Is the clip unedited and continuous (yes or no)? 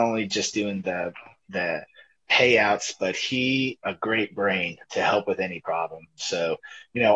no